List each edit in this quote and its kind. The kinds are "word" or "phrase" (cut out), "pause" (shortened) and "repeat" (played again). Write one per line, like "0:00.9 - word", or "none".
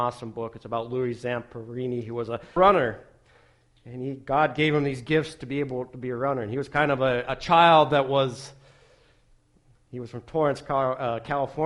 0:02.6 - word